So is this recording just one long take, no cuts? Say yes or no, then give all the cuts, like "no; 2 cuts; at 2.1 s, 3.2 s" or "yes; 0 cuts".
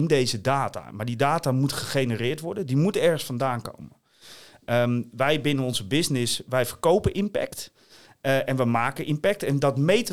yes; 0 cuts